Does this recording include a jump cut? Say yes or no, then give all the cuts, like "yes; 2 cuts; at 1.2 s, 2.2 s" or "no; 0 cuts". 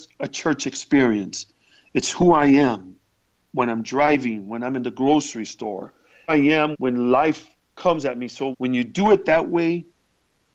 yes; 3 cuts; at 6.3 s, 6.7 s, 8.5 s